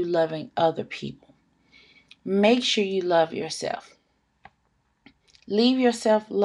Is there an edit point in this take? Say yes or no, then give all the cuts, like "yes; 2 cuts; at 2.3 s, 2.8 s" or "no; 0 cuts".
no; 0 cuts